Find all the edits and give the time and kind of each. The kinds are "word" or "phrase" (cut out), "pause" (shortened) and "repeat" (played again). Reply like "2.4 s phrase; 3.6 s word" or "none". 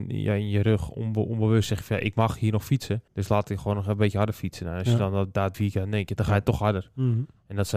3.1 s pause; 5.5 s word